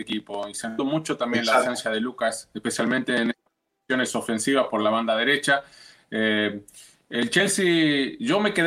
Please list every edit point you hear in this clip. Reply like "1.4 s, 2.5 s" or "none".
none